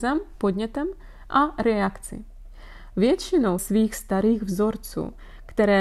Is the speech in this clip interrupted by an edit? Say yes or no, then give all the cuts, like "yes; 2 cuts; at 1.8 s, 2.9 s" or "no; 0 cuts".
yes; 1 cut; at 3.6 s